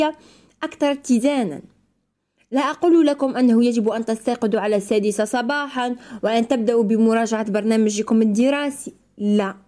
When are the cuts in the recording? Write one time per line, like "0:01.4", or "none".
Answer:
none